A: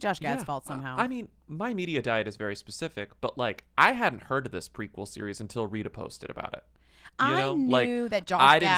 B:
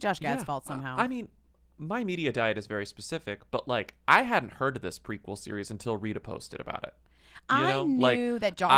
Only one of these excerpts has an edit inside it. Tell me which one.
A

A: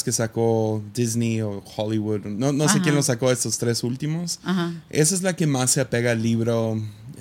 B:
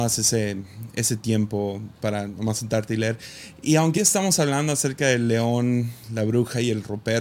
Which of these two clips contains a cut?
B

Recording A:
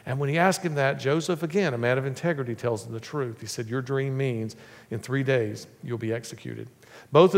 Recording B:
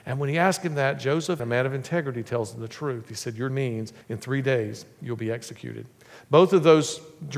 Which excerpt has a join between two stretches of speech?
B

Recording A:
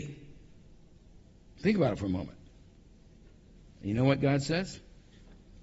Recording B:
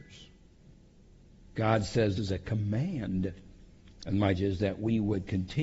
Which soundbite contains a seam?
B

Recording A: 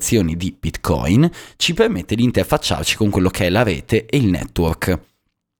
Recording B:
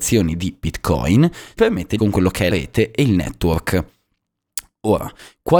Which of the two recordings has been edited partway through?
B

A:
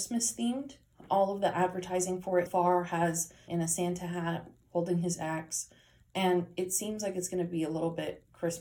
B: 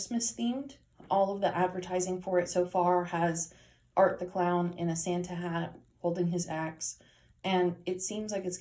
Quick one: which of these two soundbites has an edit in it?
A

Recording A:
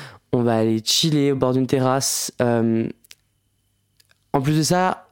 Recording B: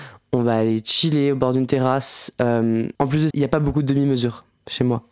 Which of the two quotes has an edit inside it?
B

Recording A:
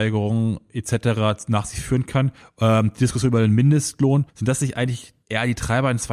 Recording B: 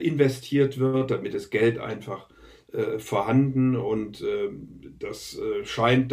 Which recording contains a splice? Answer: A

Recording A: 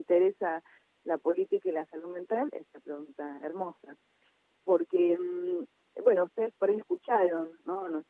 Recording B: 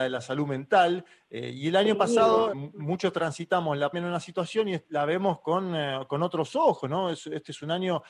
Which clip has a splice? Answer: B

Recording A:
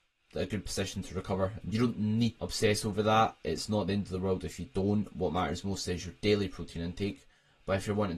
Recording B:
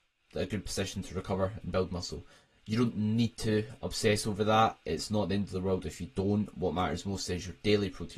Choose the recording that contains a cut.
A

